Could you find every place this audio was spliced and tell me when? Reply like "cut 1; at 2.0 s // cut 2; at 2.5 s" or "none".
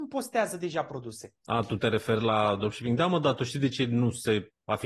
cut 1; at 1.4 s